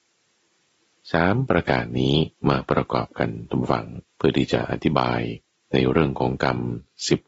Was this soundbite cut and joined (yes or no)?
yes